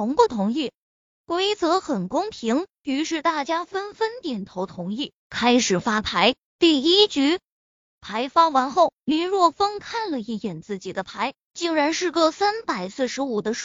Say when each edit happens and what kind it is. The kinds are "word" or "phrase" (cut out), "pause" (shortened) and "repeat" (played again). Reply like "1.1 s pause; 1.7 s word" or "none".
5.2 s pause; 6.5 s pause; 7.6 s pause